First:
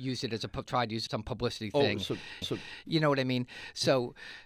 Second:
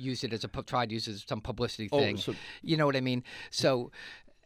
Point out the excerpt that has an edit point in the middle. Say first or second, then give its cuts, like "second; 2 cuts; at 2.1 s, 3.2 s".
first; 2 cuts; at 1.1 s, 2.4 s